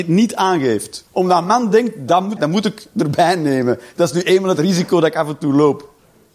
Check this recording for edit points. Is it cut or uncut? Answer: cut